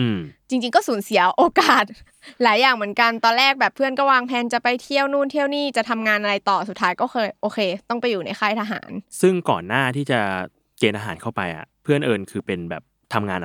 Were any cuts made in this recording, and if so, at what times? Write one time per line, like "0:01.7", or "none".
0:11.7